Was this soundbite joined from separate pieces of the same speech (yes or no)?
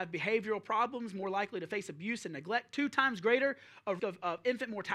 yes